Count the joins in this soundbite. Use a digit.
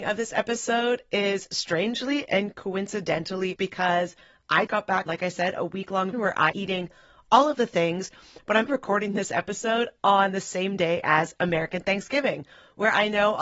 6